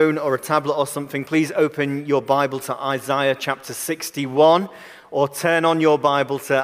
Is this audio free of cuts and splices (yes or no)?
yes